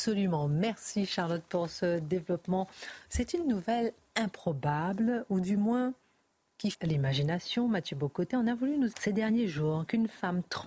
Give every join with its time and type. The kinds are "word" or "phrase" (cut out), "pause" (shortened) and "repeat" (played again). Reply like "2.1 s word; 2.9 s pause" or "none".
6.7 s word; 8.9 s word